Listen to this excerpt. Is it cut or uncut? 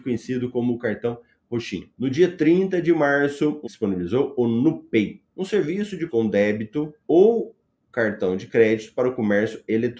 cut